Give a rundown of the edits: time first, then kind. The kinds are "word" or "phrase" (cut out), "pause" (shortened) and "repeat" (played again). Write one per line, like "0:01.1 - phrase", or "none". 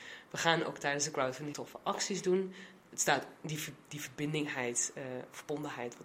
0:01.5 - word